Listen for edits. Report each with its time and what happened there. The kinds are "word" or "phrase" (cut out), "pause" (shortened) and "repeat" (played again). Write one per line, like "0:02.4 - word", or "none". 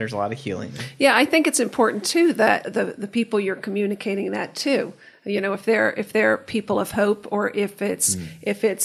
0:02.6 - word